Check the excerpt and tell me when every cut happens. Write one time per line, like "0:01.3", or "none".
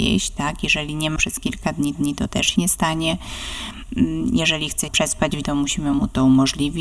0:01.2
0:01.9
0:02.6
0:04.9
0:05.4